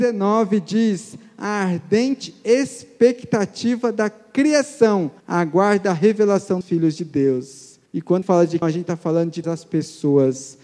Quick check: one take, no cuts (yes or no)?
no